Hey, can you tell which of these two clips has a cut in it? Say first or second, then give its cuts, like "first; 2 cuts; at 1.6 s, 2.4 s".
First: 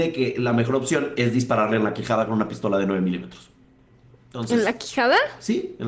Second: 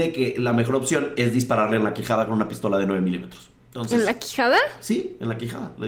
second; 1 cut; at 3.6 s